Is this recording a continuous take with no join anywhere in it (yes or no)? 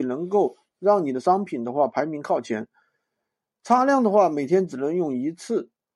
yes